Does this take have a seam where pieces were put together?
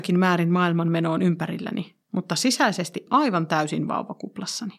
yes; 2 cuts; at 2.0 s, 3.1 s

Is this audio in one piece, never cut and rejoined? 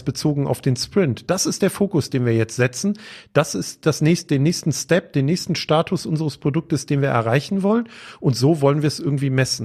yes; 0 cuts

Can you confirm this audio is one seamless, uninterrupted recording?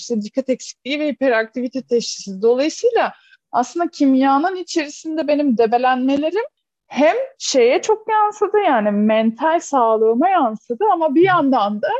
yes; 0 cuts

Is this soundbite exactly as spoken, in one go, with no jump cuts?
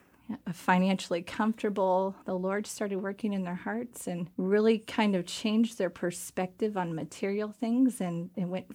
no; 2 cuts; at 2.2 s, 4.3 s

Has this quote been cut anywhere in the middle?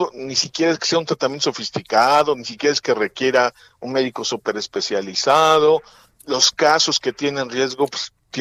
no; 0 cuts

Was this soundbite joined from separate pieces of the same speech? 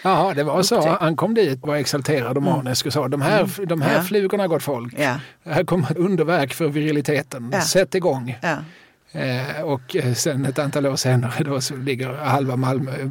yes; 2 cuts; at 1.6 s, 6.0 s

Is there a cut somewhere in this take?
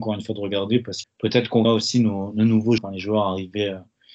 yes; 3 cuts; at 1.0 s, 1.6 s, 2.8 s

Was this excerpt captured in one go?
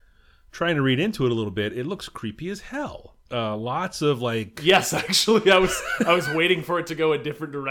no; 1 cut; at 3.3 s

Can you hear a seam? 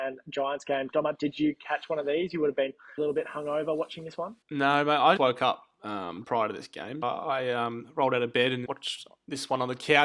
yes; 6 cuts; at 3.0 s, 4.4 s, 5.2 s, 6.2 s, 7.0 s, 8.7 s

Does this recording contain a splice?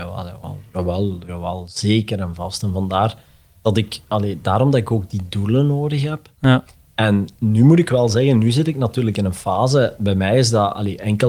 no; 0 cuts

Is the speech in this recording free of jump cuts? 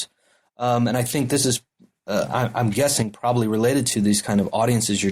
yes; 0 cuts

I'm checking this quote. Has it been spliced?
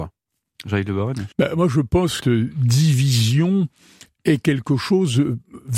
yes; 2 cuts; at 1.3 s, 2.2 s

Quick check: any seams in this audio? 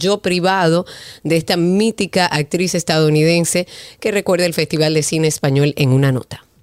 no; 0 cuts

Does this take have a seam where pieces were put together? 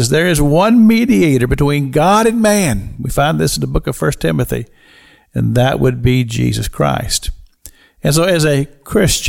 no; 0 cuts

